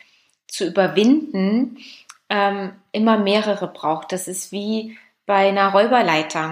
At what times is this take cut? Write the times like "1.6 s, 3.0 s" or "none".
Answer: none

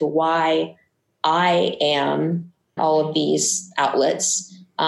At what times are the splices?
2.8 s

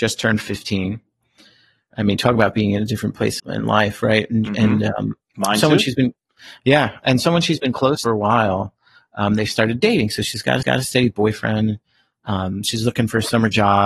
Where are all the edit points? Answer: 3.4 s, 8.0 s, 10.6 s

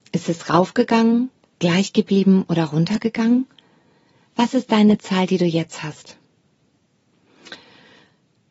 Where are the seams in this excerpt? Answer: none

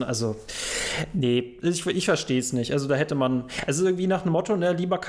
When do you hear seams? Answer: none

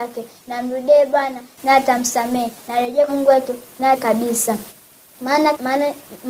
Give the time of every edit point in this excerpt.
3.1 s, 3.9 s

